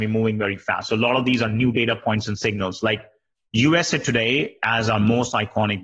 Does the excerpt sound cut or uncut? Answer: uncut